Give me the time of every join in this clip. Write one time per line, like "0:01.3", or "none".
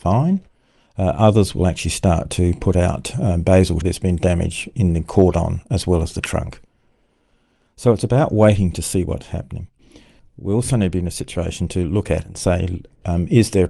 0:03.8